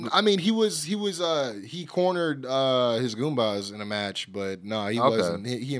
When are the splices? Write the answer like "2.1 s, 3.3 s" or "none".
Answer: none